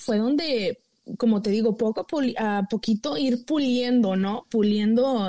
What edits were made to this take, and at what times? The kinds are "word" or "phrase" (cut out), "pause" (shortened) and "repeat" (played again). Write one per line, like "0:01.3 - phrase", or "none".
none